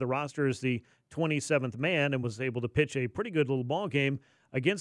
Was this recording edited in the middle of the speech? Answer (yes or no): no